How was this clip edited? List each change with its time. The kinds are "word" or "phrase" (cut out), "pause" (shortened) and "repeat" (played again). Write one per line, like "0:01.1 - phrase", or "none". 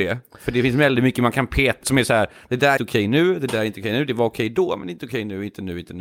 0:01.8 - word
0:02.8 - word